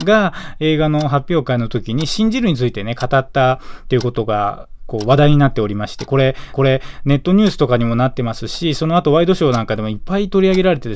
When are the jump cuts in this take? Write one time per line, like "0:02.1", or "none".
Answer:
0:06.5